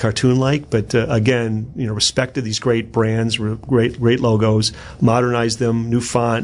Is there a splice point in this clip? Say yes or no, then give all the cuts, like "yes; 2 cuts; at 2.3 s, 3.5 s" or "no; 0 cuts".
no; 0 cuts